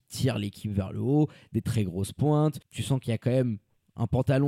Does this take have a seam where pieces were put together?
yes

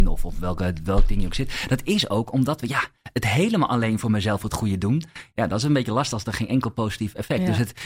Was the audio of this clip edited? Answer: no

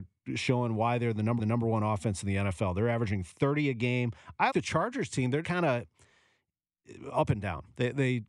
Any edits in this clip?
yes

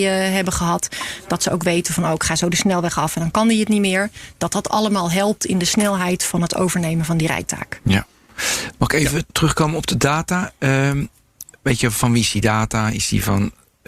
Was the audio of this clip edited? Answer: no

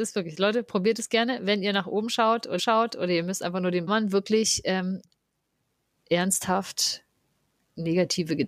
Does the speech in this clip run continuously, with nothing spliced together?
no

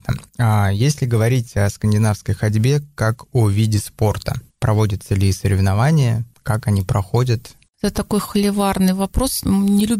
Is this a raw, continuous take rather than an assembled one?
yes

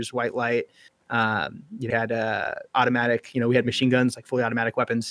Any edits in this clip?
yes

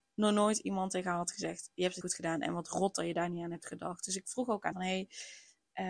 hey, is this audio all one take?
no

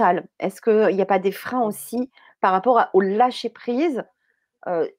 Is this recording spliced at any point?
no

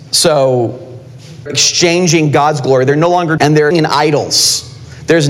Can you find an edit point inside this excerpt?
yes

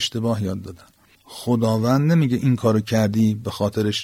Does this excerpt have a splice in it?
no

